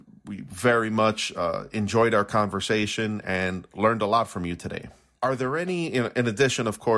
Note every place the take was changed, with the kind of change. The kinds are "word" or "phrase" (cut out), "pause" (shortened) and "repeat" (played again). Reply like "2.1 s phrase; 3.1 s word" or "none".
none